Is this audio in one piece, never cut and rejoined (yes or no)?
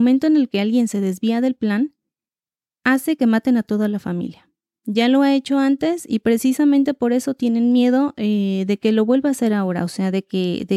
yes